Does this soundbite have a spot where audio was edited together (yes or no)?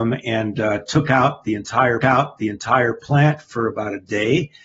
yes